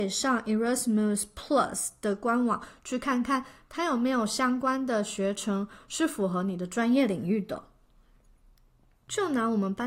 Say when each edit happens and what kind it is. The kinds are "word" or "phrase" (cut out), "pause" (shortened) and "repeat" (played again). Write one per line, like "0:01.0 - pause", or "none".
none